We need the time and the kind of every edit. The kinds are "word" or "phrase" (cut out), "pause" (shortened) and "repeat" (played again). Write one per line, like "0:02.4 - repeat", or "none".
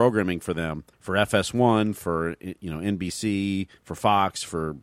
0:00.9 - pause
0:03.8 - pause